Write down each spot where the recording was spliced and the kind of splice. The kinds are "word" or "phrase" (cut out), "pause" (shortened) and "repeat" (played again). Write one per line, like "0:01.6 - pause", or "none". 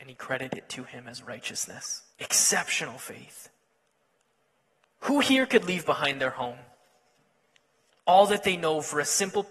0:02.1 - pause